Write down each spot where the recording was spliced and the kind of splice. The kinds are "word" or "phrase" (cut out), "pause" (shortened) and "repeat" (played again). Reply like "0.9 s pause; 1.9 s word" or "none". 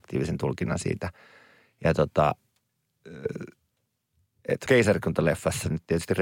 4.7 s word